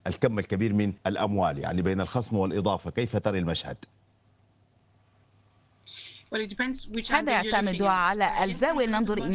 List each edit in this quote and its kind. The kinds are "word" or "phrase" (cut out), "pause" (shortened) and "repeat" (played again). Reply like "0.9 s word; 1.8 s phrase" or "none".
1.0 s pause